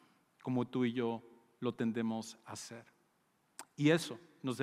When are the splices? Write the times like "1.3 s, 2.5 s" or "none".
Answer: none